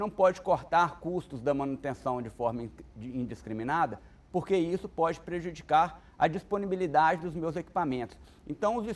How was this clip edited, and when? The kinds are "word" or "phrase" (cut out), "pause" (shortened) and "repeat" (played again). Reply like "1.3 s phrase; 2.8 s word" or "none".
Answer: none

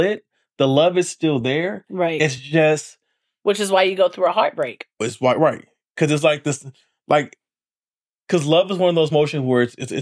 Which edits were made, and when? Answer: none

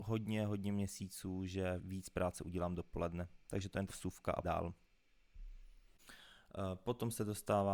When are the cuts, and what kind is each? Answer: 1.8 s word; 3.9 s word; 4.4 s word

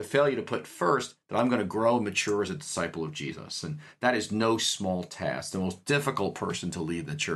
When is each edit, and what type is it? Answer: none

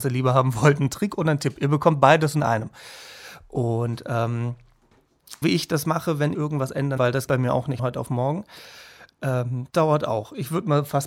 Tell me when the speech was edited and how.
5.4 s word; 6.3 s word; 7.0 s word; 7.3 s word; 7.8 s word; 9.7 s word

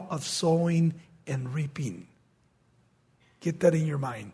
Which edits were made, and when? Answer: none

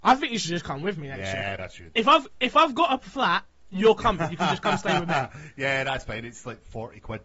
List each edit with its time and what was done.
1.6 s word

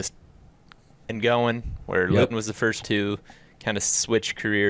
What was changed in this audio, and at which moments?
1.0 s word; 2.3 s word; 2.8 s word

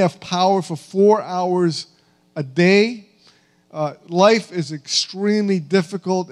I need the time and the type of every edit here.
none

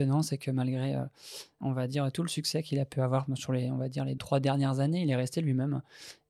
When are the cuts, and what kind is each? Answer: 1.6 s word; 4.2 s word

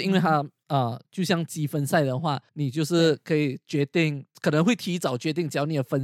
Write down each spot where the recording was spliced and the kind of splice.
2.5 s pause; 4.3 s pause

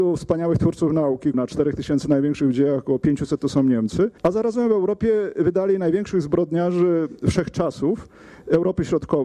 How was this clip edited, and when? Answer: 1.3 s word; 4.2 s pause

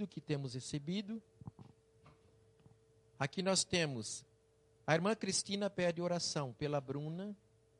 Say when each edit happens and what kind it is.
none

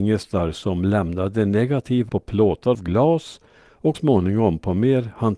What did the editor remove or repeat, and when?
2.1 s word; 2.7 s word; 3.9 s word

